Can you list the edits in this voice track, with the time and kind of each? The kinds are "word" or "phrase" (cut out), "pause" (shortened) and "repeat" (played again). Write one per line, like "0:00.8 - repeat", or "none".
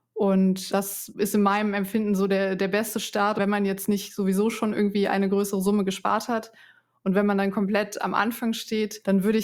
none